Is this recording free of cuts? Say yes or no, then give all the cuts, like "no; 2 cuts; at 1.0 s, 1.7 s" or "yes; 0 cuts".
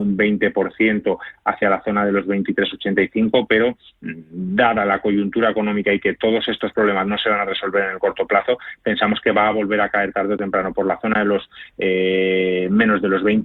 yes; 0 cuts